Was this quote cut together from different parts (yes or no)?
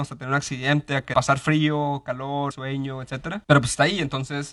yes